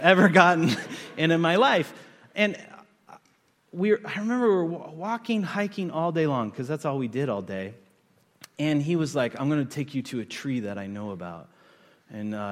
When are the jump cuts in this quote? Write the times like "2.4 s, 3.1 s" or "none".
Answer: none